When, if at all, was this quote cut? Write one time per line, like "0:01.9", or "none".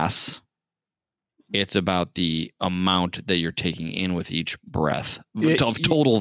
none